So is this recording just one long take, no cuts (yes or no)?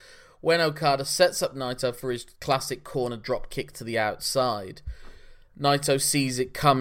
yes